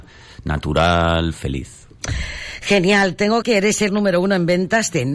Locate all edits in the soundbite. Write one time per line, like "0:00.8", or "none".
0:03.4
0:03.9